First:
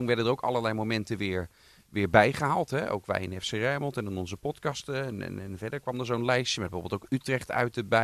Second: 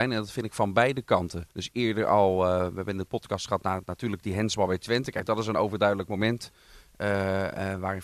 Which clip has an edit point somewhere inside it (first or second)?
second